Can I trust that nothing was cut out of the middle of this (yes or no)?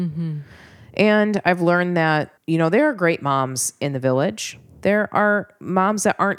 no